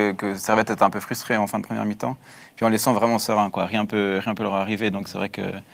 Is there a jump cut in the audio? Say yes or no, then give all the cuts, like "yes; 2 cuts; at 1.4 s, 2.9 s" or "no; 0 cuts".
no; 0 cuts